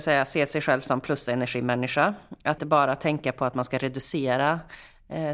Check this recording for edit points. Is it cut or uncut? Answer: cut